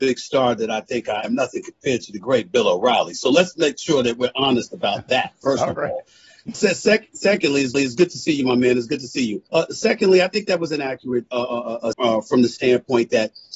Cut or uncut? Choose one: cut